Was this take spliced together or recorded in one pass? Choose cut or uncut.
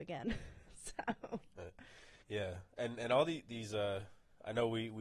cut